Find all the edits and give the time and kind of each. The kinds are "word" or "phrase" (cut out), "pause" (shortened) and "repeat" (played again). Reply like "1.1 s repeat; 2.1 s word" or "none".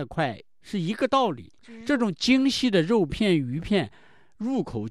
1.6 s pause